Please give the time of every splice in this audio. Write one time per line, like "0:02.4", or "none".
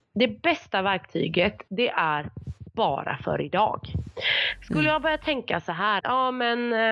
0:01.7
0:06.0